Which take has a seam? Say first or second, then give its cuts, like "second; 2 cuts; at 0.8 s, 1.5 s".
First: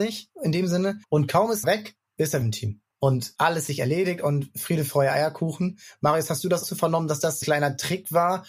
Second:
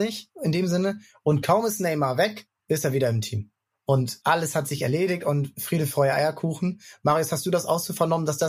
first; 7 cuts; at 1.0 s, 1.6 s, 2.4 s, 2.9 s, 3.7 s, 6.6 s, 7.4 s